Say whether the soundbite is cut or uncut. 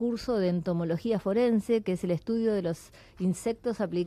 uncut